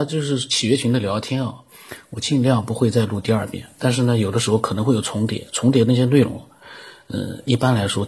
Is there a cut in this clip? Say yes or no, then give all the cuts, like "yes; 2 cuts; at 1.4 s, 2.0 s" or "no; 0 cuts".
no; 0 cuts